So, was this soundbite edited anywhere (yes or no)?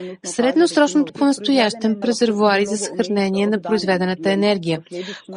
yes